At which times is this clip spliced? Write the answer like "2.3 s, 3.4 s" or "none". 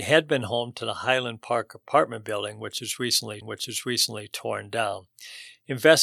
3.4 s